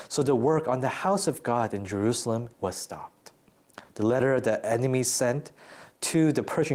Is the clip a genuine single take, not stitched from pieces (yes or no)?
no